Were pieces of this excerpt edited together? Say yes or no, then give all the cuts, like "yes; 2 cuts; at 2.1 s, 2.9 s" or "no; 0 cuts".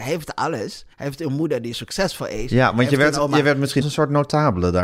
yes; 3 cuts; at 0.9 s, 1.7 s, 3.8 s